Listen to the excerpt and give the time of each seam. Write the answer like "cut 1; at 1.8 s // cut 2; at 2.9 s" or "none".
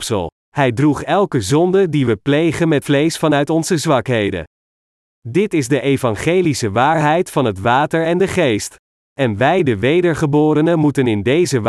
cut 1; at 2.8 s